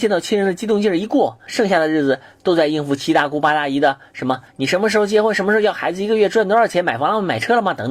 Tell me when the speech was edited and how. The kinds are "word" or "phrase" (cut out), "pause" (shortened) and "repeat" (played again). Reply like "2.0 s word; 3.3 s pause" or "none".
4.5 s pause